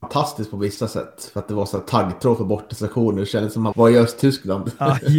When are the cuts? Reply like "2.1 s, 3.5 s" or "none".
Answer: 3.7 s